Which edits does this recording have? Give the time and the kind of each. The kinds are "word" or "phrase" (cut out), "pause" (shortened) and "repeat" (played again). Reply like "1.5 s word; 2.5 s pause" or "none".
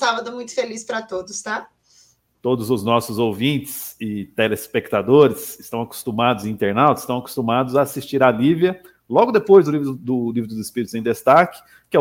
none

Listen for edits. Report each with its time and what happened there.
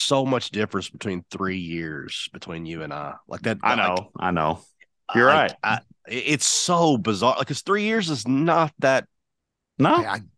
none

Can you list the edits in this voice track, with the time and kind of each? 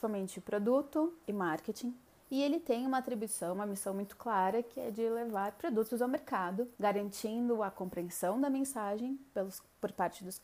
1.2 s word; 2.1 s pause; 6.7 s pause

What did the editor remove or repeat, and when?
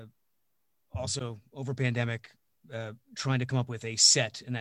3.0 s pause

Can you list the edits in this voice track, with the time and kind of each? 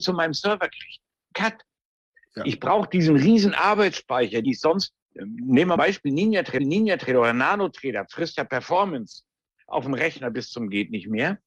4.4 s phrase; 5.0 s pause; 5.8 s phrase; 6.6 s repeat

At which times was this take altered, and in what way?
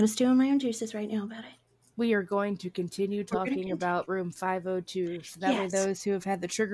1.9 s pause

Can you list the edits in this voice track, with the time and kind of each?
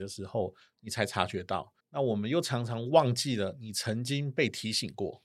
1.8 s pause

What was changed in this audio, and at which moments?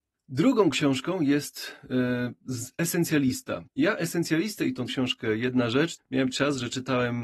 3.7 s pause; 4.9 s word; 6.0 s word; 6.3 s word

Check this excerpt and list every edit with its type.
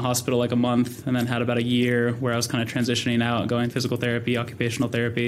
3.7 s phrase

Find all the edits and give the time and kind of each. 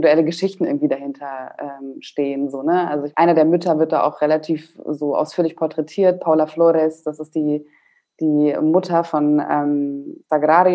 none

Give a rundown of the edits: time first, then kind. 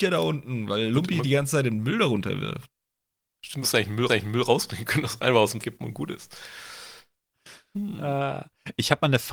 3.6 s word; 4.1 s repeat; 5.6 s word

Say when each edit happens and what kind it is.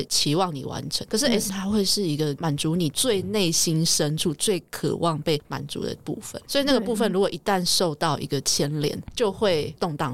1.5 s word

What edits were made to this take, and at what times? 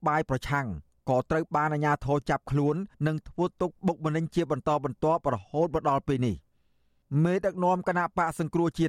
2.9 s pause

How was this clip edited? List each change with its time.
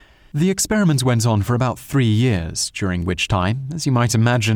none

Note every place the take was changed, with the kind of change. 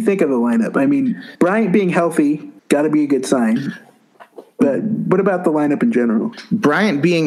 1.3 s pause; 2.6 s pause

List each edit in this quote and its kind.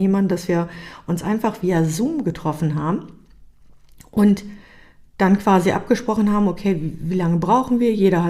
none

